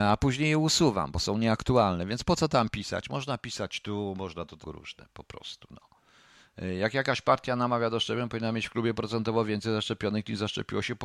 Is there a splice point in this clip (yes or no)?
yes